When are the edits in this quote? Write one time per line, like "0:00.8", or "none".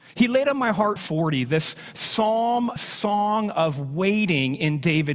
0:01.0
0:02.8